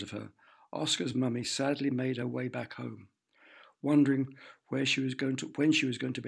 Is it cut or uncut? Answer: uncut